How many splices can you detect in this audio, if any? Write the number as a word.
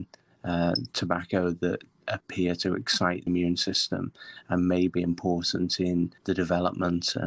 two